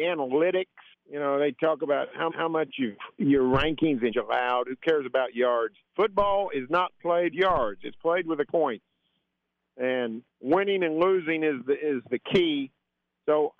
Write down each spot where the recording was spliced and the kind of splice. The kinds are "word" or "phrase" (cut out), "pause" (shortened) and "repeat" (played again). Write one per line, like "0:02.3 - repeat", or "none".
0:00.9 - pause
0:02.3 - repeat
0:03.2 - word
0:04.1 - word
0:05.9 - pause
0:07.3 - phrase
0:08.5 - phrase
0:10.3 - pause